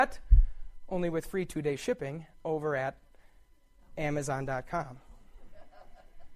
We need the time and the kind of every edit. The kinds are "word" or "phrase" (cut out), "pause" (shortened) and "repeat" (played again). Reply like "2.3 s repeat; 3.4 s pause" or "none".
none